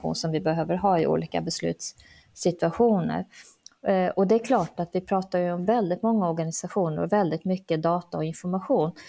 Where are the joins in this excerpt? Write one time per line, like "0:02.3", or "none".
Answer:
none